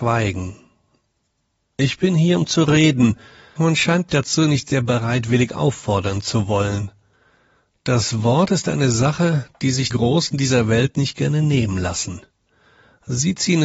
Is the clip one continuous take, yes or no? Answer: no